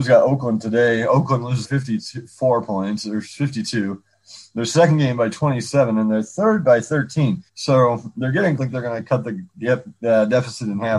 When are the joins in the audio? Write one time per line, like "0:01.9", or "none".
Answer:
0:01.6
0:07.5
0:08.6